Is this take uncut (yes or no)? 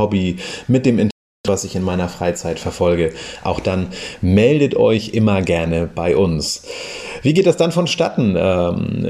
yes